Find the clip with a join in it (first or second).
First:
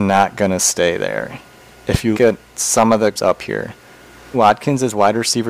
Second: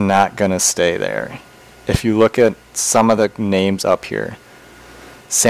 first